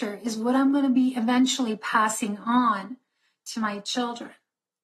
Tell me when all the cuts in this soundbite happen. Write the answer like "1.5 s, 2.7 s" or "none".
none